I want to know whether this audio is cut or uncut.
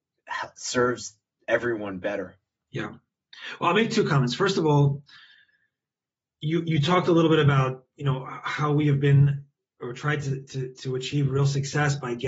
uncut